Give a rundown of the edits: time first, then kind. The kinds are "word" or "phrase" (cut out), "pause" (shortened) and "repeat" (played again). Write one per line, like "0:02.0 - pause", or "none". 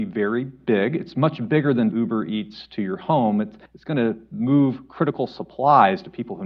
0:01.9 - word
0:03.7 - pause